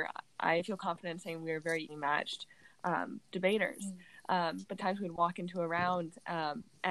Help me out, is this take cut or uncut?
cut